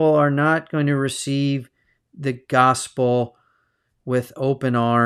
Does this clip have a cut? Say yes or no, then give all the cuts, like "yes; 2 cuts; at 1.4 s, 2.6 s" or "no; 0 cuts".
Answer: no; 0 cuts